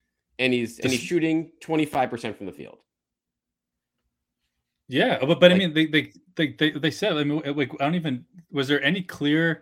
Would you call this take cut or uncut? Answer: uncut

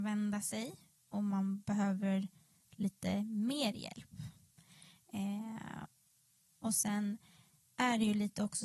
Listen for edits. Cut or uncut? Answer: uncut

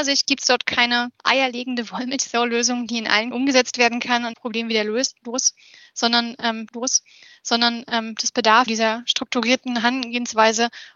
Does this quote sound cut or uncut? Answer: cut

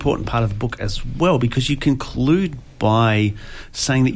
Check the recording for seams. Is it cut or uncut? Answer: uncut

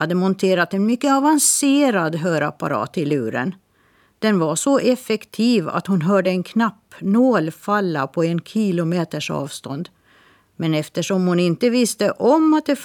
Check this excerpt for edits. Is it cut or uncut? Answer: uncut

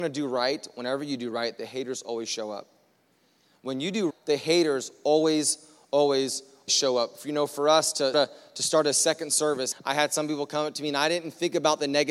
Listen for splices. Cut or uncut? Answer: cut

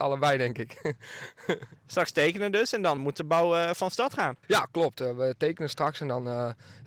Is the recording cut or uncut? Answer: cut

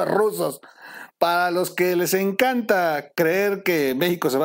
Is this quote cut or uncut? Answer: cut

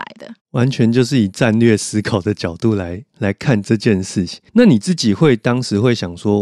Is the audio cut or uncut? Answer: cut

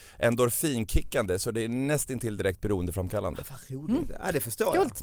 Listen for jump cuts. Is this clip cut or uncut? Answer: uncut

